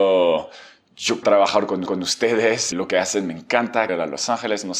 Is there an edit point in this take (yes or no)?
yes